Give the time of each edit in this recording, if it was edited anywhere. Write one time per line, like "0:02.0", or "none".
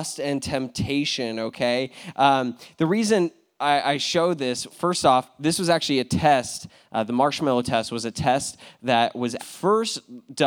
0:04.7
0:09.4